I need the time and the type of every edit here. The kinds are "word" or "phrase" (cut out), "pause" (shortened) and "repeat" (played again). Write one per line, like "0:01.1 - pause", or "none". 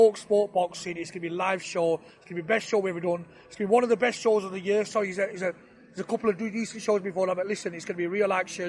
none

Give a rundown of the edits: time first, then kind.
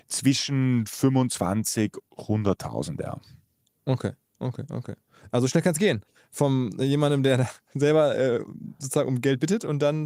0:02.0 - word

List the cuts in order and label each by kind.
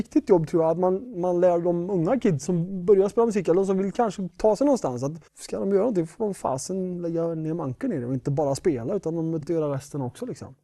0:02.5 - word
0:05.3 - pause
0:09.4 - word

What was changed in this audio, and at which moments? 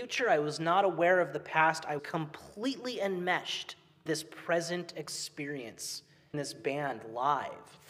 0:02.0 - word
0:04.1 - word
0:06.3 - word

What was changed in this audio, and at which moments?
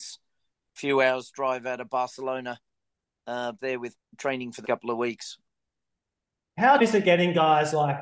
0:03.6 - word
0:04.0 - word
0:04.6 - word
0:06.8 - word

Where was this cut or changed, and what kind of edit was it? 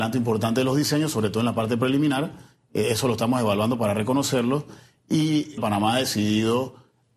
0:05.6 - phrase

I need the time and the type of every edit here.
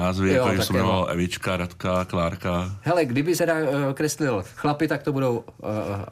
0:03.4 - word

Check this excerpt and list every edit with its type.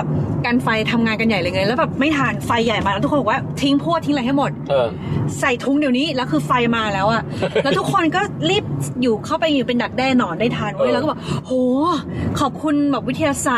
none

